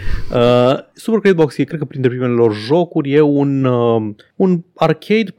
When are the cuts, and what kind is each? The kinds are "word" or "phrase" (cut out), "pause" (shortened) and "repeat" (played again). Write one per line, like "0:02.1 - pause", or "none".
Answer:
none

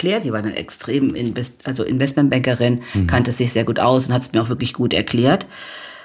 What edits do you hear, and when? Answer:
none

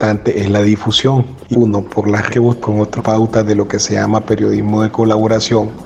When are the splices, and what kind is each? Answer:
0:01.5 - phrase
0:02.3 - word
0:02.6 - word
0:03.0 - phrase

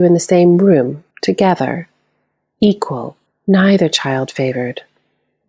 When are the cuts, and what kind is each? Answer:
0:01.1 - pause
0:03.3 - pause

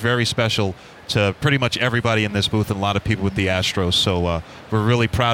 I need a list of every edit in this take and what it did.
none

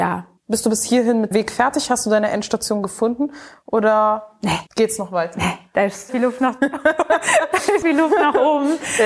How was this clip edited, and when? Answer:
0:01.3 - word
0:04.7 - pause
0:06.1 - word
0:07.8 - word

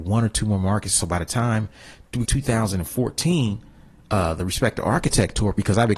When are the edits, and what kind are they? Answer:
0:02.2 - phrase

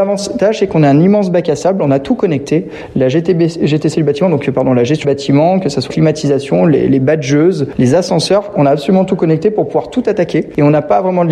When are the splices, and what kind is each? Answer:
0:05.0 - word
0:05.9 - word

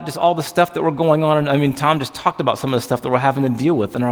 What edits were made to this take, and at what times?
none

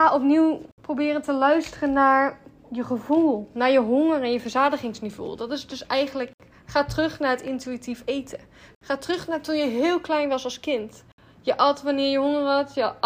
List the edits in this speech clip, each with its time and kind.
none

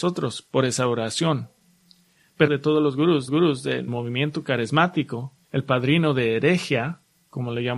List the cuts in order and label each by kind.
0:02.5 - phrase
0:03.3 - repeat
0:03.9 - word
0:05.4 - pause

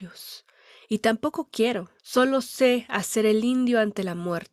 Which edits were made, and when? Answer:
0:02.0 - pause

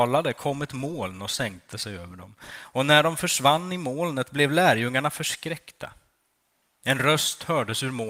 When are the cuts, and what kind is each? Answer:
none

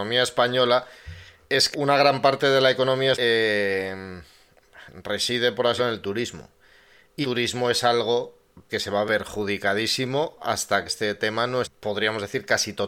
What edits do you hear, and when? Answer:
0:01.7 - word
0:03.1 - word
0:05.8 - word
0:07.2 - word
0:08.7 - word
0:09.1 - word
0:10.9 - word
0:11.6 - word

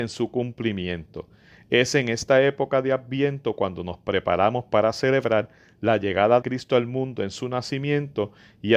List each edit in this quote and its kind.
0:06.4 - word

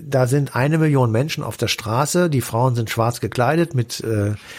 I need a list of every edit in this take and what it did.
none

